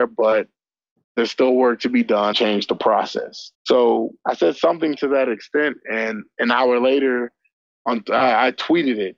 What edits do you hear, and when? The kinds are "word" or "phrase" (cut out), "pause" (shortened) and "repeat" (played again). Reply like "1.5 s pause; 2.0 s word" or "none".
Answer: 2.3 s phrase; 3.5 s pause